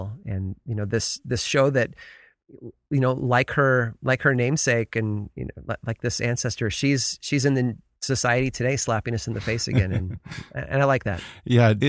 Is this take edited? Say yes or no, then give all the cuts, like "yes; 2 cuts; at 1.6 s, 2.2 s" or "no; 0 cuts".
no; 0 cuts